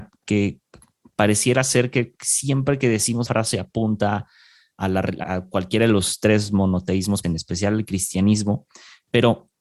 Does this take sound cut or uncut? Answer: cut